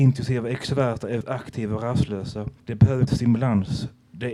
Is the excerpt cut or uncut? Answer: cut